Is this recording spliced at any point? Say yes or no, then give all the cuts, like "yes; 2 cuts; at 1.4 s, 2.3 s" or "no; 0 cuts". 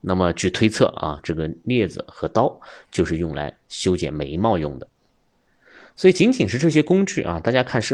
no; 0 cuts